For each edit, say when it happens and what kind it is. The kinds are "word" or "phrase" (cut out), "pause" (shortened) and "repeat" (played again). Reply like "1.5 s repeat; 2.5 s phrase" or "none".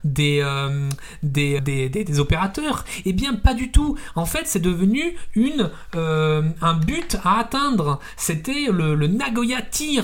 1.6 s word